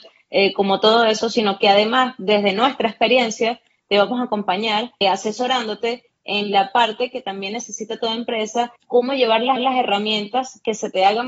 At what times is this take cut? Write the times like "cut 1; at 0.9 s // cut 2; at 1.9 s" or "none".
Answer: cut 1; at 5.0 s // cut 2; at 8.8 s // cut 3; at 9.6 s